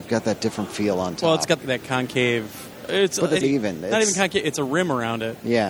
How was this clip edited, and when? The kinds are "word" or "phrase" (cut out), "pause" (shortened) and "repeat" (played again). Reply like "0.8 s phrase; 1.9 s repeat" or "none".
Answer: 1.6 s word; 3.4 s phrase